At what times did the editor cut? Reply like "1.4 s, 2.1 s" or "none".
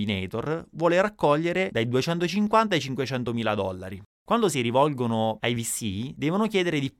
none

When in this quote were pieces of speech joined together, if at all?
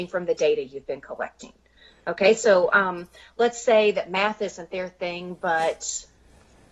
none

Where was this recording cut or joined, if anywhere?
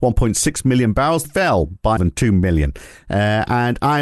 1.2 s, 2.0 s

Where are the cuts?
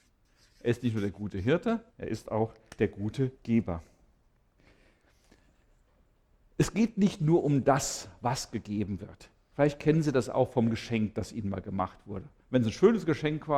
1.9 s, 3.3 s

